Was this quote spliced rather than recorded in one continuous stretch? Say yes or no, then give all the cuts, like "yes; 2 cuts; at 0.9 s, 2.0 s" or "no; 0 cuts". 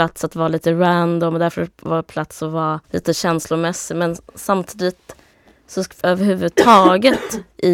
yes; 2 cuts; at 2.8 s, 6.0 s